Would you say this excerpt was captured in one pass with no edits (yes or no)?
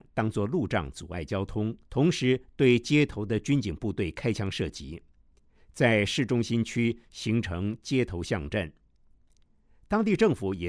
no